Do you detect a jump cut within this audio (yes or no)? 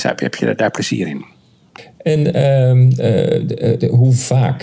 no